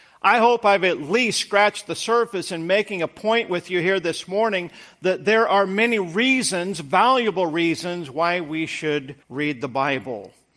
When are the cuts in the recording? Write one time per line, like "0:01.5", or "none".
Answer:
0:09.2